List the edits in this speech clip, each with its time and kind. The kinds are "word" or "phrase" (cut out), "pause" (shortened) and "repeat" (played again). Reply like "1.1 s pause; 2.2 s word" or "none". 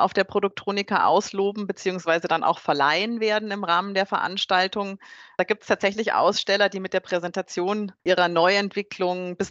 8.0 s pause